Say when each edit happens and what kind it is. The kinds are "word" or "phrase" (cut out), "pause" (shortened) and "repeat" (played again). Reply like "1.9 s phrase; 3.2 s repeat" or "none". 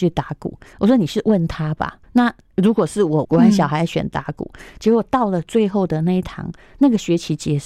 2.0 s pause; 3.2 s phrase